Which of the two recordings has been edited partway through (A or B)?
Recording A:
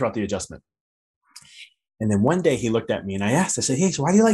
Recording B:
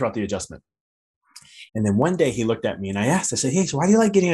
B